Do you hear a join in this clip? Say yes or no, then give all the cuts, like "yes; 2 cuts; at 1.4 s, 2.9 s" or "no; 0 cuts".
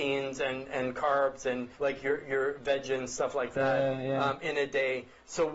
yes; 1 cut; at 1.7 s